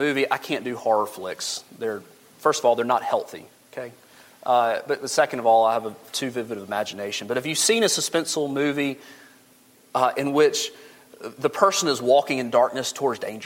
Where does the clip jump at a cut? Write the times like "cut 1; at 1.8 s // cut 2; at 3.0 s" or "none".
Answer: none